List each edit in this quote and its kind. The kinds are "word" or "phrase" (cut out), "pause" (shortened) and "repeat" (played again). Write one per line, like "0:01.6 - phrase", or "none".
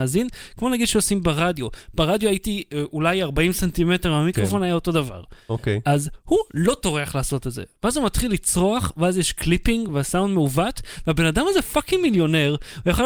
none